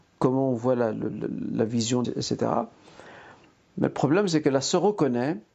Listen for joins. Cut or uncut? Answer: cut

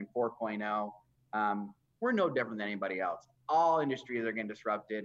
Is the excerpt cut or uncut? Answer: uncut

